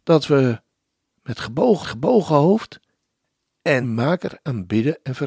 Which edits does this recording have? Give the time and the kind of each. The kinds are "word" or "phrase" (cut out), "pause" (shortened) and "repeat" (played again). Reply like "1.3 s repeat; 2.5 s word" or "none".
1.8 s repeat; 3.8 s phrase